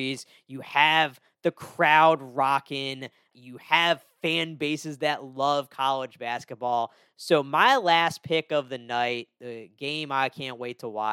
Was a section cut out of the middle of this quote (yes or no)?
yes